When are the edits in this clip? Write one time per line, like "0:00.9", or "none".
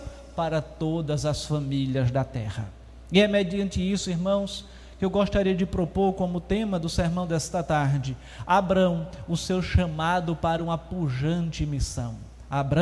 none